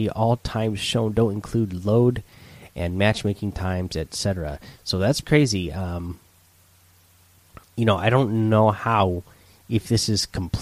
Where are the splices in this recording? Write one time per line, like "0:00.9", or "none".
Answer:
0:05.2